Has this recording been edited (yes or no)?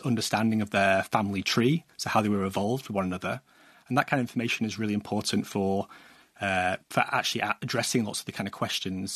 no